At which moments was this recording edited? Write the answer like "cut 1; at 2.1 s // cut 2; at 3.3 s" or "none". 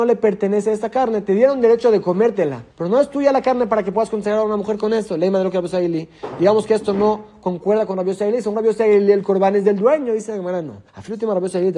cut 1; at 2.7 s // cut 2; at 10.9 s